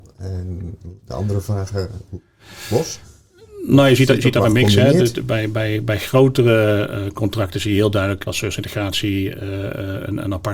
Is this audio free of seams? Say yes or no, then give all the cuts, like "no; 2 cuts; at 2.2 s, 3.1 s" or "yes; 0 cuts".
no; 2 cuts; at 1.0 s, 8.3 s